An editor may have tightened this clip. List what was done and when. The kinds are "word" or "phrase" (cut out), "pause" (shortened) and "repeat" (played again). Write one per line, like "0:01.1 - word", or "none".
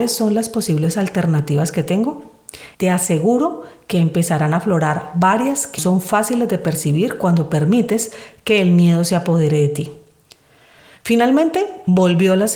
0:02.7 - pause
0:05.8 - word